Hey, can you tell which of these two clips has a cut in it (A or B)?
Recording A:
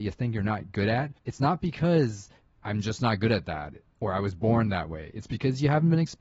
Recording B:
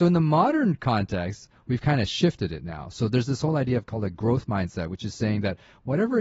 A